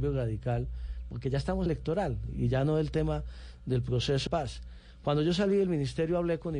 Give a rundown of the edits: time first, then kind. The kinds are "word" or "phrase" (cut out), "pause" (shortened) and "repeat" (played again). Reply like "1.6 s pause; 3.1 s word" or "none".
1.7 s phrase; 4.3 s word